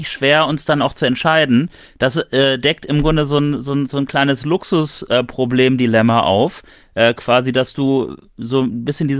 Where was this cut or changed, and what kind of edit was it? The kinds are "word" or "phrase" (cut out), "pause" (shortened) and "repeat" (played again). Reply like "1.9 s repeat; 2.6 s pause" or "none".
none